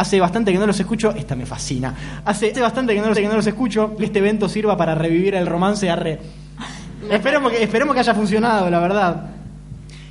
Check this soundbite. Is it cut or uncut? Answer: cut